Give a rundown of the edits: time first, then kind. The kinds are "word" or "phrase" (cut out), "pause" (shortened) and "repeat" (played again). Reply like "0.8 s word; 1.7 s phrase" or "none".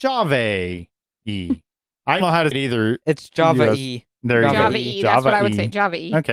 2.2 s word; 2.5 s word